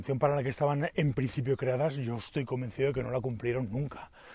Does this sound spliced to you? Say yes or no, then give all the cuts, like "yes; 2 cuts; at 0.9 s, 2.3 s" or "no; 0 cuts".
no; 0 cuts